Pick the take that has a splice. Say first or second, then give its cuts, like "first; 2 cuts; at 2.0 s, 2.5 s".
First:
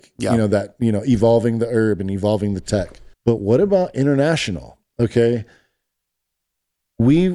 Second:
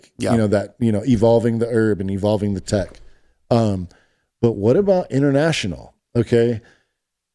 first; 1 cut; at 3.1 s